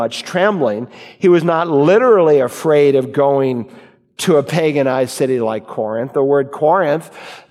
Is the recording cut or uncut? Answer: uncut